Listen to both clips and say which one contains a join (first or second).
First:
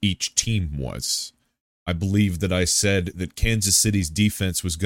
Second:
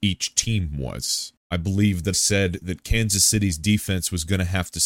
second